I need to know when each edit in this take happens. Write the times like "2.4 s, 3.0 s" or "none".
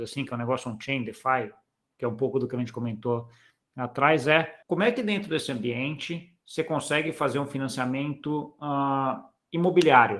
4.6 s